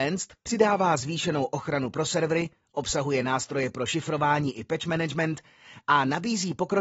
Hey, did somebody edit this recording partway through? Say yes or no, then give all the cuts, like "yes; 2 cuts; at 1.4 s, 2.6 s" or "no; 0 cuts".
no; 0 cuts